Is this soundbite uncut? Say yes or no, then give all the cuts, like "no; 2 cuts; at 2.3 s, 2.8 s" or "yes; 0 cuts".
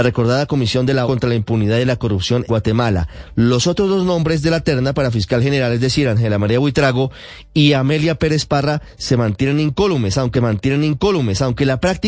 no; 3 cuts; at 1.0 s, 2.5 s, 10.3 s